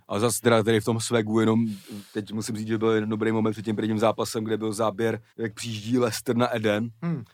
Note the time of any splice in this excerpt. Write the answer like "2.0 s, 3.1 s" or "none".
5.3 s